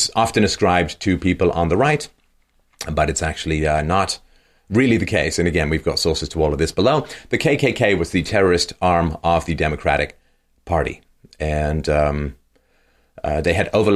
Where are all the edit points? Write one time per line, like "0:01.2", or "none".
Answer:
none